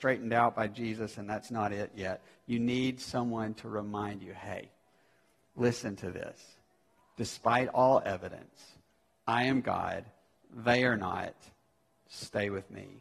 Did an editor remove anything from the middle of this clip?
no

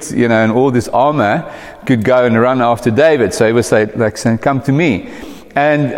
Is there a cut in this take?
no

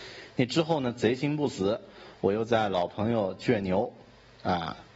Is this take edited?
no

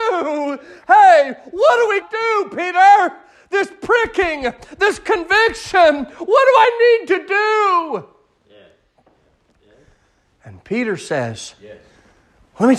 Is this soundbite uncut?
no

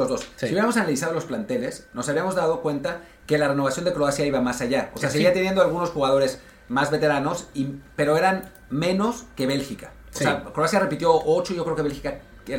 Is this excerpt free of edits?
yes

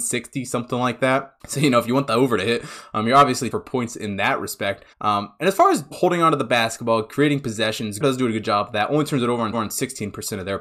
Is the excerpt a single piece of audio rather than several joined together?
no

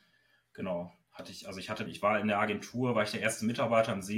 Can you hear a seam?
yes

